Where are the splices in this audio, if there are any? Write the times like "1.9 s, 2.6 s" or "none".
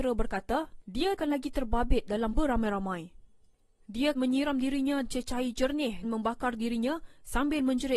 1.2 s, 2.3 s, 4.1 s, 5.0 s, 6.0 s